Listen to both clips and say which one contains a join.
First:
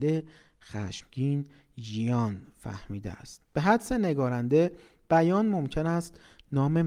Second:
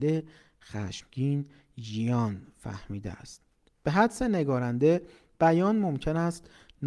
first; 1 cut; at 3.4 s

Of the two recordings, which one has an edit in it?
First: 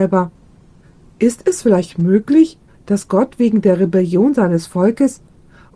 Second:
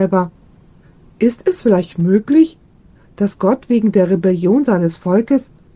first; 1 cut; at 2.7 s

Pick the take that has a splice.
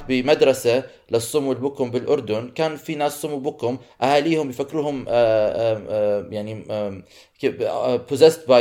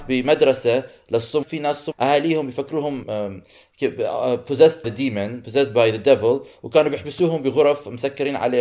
second; 4 cuts; at 1.4 s, 1.9 s, 3.0 s, 4.8 s

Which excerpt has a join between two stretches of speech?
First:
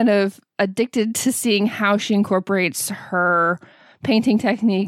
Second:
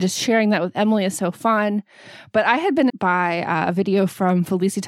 second; 1 cut; at 2.9 s

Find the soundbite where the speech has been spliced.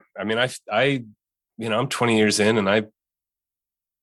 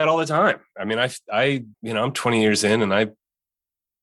second; 1 cut; at 1.7 s

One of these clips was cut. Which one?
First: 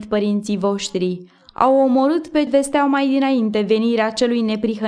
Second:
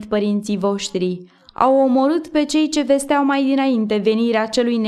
first; 1 cut; at 2.5 s

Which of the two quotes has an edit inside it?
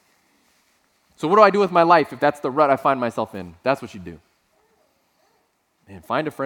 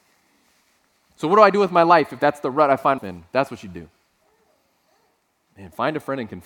second; 1 cut; at 3.0 s

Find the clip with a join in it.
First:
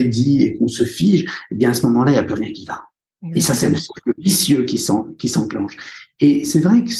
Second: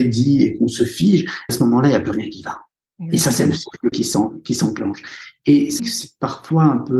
second; 3 cuts; at 1.5 s, 3.9 s, 5.8 s

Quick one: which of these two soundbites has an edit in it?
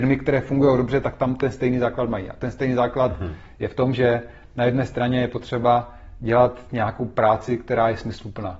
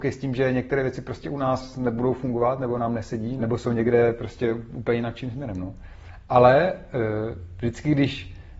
second; 1 cut; at 3.4 s

